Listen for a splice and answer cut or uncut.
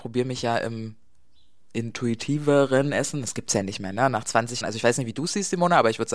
cut